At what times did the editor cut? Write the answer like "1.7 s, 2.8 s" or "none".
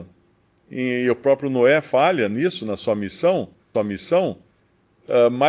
3.7 s